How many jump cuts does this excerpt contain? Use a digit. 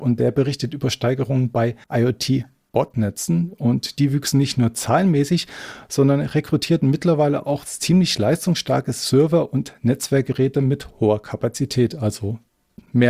1